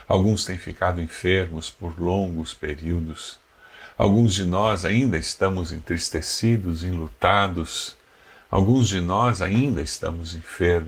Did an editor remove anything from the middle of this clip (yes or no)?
no